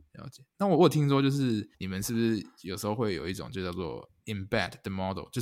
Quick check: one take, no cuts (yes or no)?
no